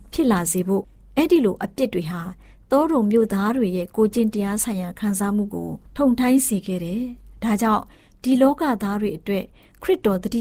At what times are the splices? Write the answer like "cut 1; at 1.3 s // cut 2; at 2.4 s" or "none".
cut 1; at 5.9 s

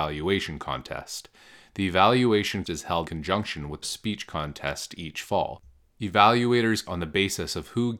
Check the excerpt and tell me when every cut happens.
cut 1; at 2.6 s // cut 2; at 3.0 s // cut 3; at 3.8 s // cut 4; at 6.8 s

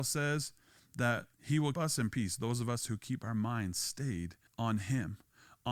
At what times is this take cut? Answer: cut 1; at 1.3 s // cut 2; at 1.7 s // cut 3; at 2.1 s // cut 4; at 4.5 s

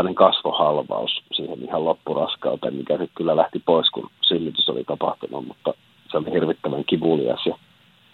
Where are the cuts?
none

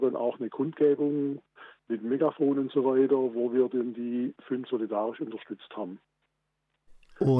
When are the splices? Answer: cut 1; at 4.7 s

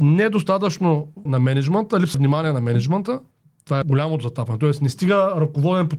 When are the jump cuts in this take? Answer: cut 1; at 1.3 s // cut 2; at 2.1 s // cut 3; at 3.3 s // cut 4; at 3.8 s

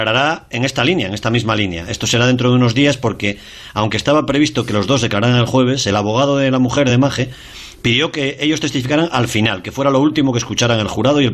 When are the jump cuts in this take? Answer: none

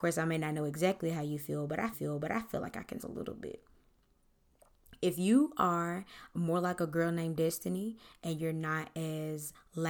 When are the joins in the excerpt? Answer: cut 1; at 1.9 s // cut 2; at 3.0 s // cut 3; at 6.3 s

